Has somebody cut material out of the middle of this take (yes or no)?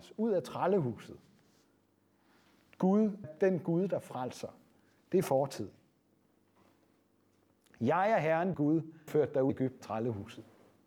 yes